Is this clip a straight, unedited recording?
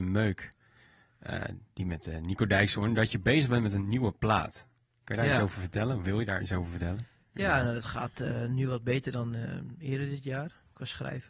yes; 0 cuts

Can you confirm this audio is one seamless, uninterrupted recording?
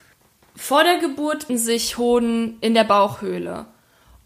no; 1 cut; at 1.5 s

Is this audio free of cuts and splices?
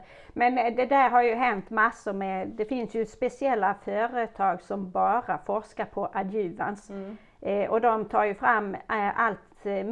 yes; 0 cuts

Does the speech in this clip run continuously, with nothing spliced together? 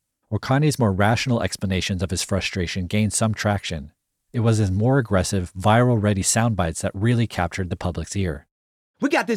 yes; 0 cuts

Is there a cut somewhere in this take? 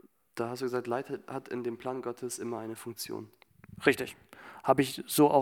no; 0 cuts

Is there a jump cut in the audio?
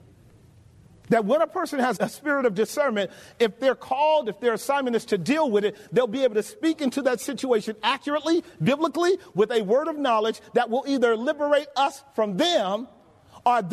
yes; 1 cut; at 2.0 s

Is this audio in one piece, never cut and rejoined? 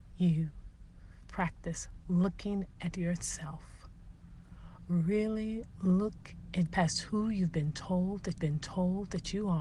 no; 3 cuts; at 1.2 s, 6.7 s, 8.4 s

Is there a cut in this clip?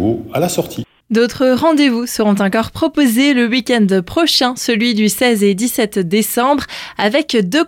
no; 0 cuts

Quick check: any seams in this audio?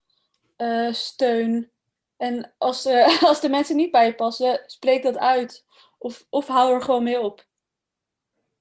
no; 0 cuts

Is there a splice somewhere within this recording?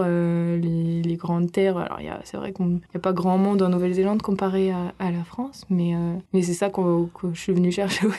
yes; 2 cuts; at 2.9 s, 6.3 s

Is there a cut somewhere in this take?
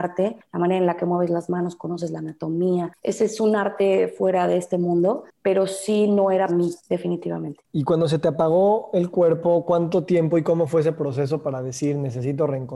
yes; 1 cut; at 6.5 s

